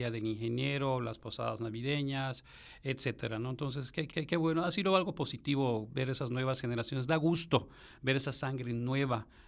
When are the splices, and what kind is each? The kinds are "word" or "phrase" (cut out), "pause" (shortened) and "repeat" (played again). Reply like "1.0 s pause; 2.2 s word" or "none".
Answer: 4.1 s repeat